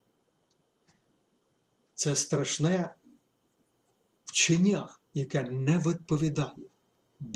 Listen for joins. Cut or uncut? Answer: cut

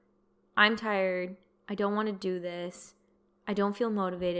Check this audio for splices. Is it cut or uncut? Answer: uncut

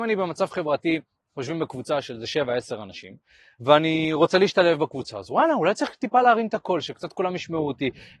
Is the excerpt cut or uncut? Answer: uncut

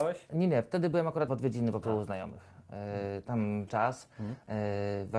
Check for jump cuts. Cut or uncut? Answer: cut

